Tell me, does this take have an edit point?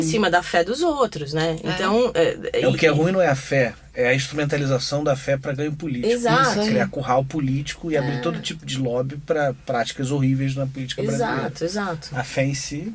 no; 0 cuts

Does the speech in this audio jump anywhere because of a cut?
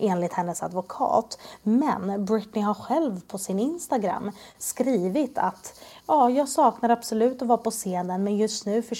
no; 0 cuts

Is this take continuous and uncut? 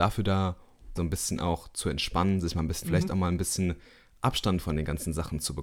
no; 2 cuts; at 1.0 s, 2.8 s

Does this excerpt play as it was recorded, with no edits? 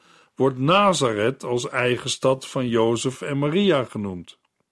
yes; 0 cuts

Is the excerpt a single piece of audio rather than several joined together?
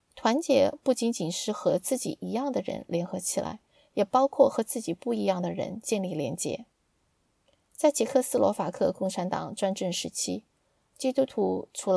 yes; 0 cuts

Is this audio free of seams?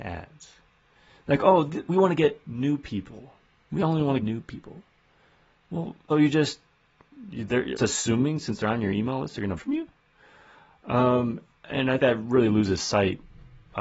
no; 6 cuts; at 1.9 s, 4.2 s, 6.1 s, 7.8 s, 9.6 s, 12.0 s

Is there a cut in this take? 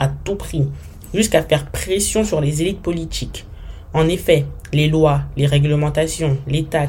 no; 0 cuts

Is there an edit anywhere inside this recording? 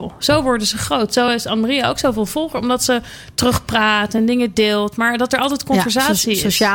no; 0 cuts

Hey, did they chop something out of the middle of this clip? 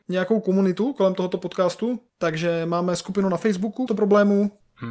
yes; 1 cut; at 3.9 s

